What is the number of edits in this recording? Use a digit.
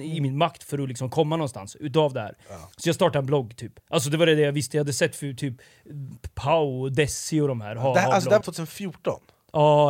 3